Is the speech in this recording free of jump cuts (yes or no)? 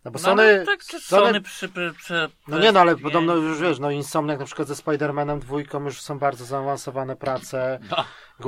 yes